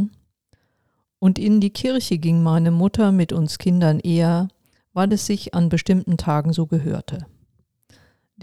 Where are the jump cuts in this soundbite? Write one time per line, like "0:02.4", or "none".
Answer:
none